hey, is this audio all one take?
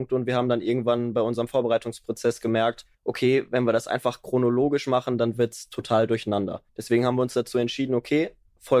no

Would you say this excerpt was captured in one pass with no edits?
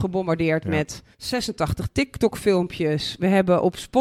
no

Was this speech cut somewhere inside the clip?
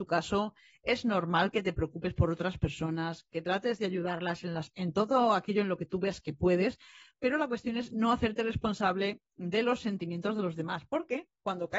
no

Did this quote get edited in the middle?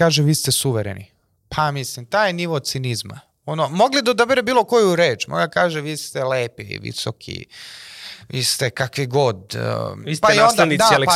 no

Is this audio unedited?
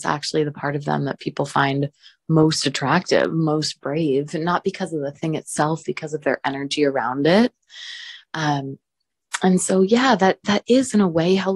yes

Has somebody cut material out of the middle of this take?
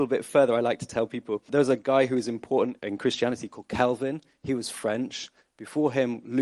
yes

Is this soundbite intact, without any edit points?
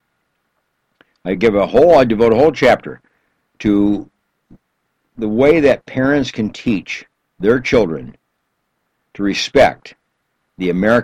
yes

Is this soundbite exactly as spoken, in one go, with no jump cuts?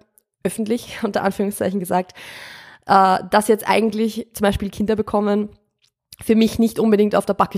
yes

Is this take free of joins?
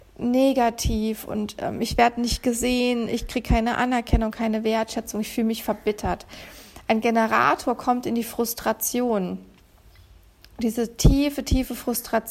yes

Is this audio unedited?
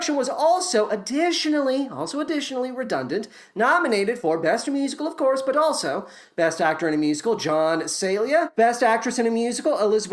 yes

